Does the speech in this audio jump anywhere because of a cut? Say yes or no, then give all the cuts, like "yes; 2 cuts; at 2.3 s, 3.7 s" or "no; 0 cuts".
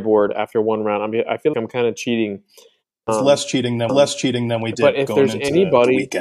yes; 3 cuts; at 1.5 s, 3.1 s, 3.9 s